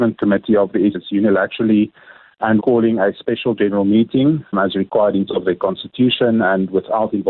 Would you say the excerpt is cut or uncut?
cut